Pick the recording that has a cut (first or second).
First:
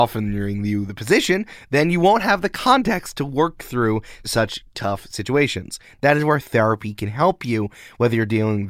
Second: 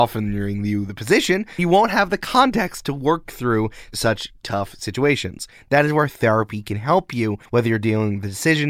second